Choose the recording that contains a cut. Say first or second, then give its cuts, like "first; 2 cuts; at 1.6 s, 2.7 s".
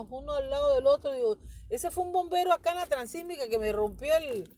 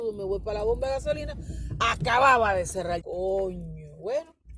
second; 1 cut; at 3.0 s